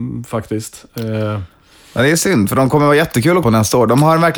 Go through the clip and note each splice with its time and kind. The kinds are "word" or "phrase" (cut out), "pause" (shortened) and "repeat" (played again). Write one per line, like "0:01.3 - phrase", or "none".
0:03.4 - word

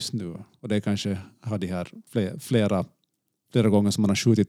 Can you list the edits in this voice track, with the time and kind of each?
0:02.1 - word

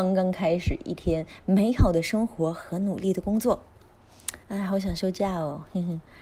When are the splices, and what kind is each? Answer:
0:04.4 - pause

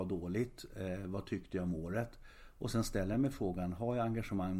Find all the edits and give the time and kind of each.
none

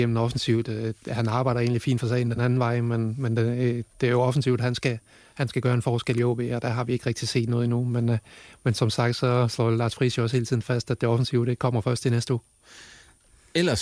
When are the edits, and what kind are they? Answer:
none

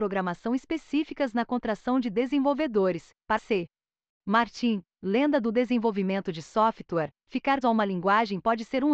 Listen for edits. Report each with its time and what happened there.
0:03.4 - word
0:07.6 - word

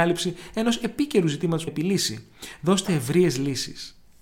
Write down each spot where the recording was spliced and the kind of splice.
0:01.7 - phrase

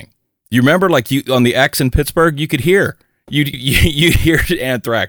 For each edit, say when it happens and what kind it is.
0:03.5 - word

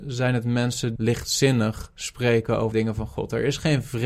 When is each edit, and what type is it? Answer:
0:01.0 - word
0:02.7 - word

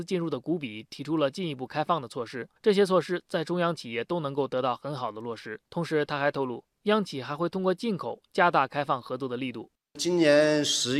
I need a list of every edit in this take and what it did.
0:02.6 - pause
0:05.7 - pause

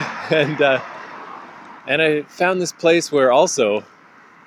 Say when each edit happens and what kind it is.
0:01.8 - pause

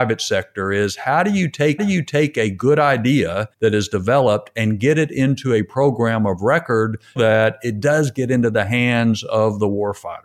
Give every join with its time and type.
0:01.8 - repeat
0:03.5 - pause
0:07.2 - word

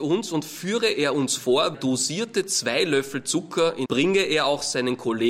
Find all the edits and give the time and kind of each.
0:01.7 - phrase
0:03.9 - phrase

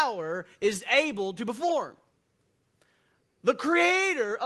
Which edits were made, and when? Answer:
none

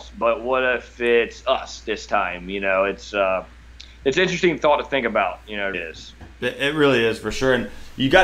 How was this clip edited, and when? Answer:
0:05.7 - word

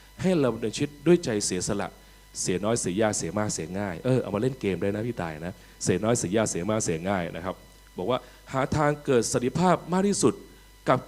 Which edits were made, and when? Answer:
none

